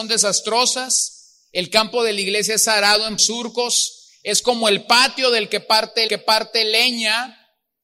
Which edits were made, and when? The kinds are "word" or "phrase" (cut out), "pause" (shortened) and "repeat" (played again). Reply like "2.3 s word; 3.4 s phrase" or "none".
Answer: 3.2 s word; 6.1 s repeat